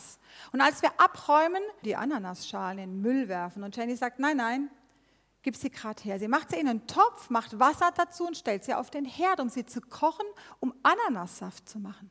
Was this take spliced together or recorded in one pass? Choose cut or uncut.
cut